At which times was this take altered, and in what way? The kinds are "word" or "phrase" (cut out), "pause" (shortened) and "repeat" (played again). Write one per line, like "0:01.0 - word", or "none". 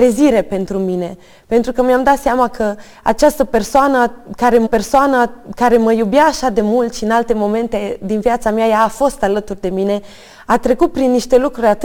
0:04.7 - repeat